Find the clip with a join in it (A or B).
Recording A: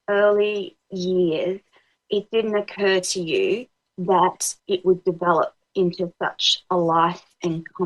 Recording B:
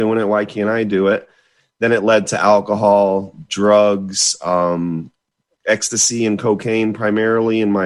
A